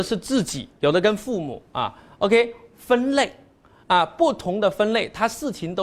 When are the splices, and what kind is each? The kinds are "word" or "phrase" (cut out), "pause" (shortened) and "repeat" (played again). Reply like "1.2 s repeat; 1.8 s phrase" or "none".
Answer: none